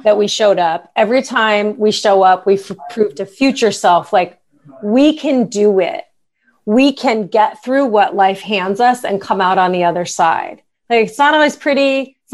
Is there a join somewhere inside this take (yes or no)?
no